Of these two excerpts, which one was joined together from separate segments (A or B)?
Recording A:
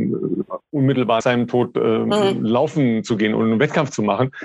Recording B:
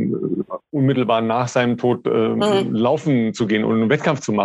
A